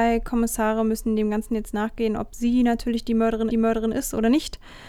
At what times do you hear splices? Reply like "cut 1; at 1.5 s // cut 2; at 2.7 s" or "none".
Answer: cut 1; at 3.5 s